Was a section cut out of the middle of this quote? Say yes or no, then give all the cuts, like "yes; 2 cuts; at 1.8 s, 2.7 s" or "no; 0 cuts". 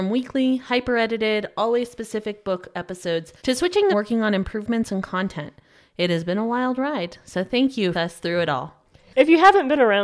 yes; 3 cuts; at 3.4 s, 3.9 s, 7.9 s